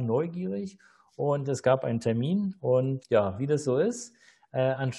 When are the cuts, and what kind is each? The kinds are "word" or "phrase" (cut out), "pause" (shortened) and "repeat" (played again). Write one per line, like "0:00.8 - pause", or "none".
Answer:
0:03.0 - word